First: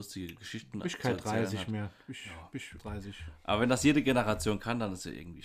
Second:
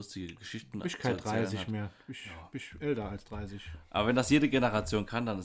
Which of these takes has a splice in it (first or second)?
first